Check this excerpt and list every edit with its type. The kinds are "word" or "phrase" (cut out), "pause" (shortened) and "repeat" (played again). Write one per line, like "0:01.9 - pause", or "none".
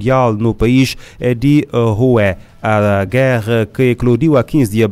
none